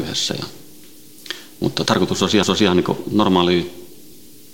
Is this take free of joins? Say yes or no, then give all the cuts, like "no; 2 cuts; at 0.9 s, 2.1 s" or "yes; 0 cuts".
no; 2 cuts; at 1.9 s, 2.4 s